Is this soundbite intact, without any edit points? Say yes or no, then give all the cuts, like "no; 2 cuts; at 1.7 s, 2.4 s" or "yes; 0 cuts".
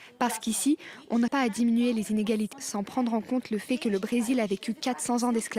no; 2 cuts; at 1.3 s, 2.5 s